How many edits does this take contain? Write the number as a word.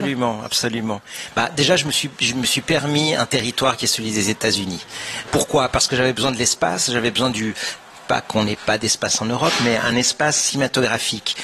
zero